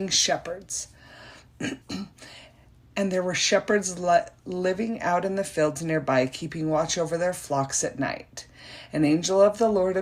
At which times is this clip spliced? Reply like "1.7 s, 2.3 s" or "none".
1.8 s